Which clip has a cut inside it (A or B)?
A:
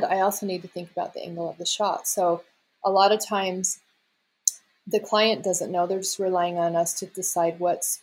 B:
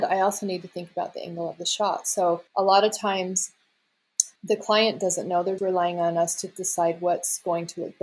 B